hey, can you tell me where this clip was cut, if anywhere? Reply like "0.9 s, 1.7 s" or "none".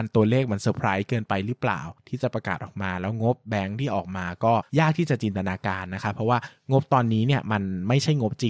4.7 s